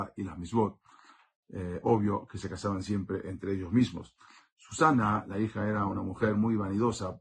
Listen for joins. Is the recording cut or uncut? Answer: uncut